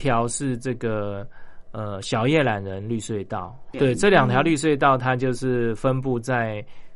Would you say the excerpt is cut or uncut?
cut